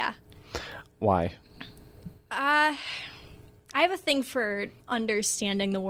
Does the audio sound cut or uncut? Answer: cut